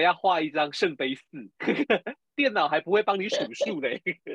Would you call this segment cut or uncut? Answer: cut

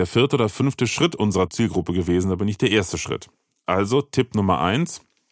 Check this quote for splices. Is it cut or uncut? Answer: uncut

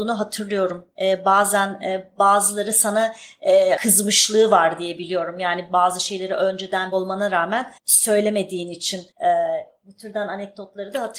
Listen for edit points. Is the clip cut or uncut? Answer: cut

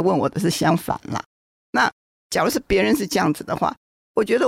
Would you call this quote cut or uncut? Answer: uncut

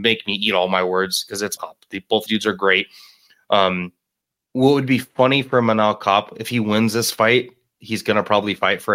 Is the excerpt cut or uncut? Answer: cut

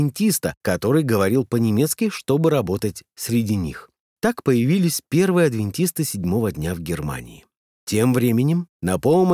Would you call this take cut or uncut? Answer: uncut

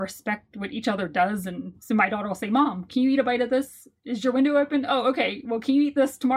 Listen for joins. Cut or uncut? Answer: cut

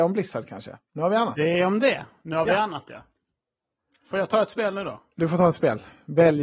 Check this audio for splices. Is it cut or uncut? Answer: uncut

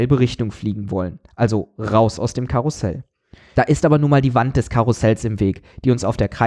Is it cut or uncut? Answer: uncut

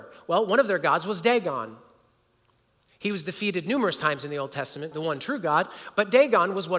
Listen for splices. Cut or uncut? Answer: cut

